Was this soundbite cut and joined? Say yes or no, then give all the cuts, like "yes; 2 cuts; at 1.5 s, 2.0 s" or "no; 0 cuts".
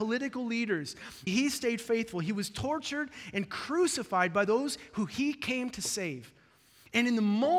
yes; 1 cut; at 1.3 s